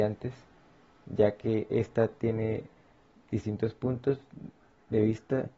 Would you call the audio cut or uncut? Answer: uncut